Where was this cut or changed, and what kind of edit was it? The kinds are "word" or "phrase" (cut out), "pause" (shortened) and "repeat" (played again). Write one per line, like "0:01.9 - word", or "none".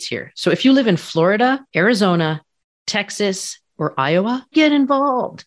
0:01.7 - pause
0:03.7 - word
0:04.5 - word